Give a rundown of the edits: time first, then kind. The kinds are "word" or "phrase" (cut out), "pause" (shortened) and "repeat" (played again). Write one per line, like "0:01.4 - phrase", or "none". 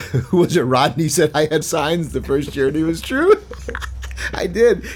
0:01.6 - word
0:02.1 - phrase